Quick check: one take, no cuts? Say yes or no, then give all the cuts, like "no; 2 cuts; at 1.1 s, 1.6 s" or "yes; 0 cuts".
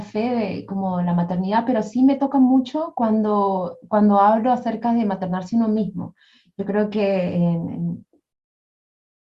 yes; 0 cuts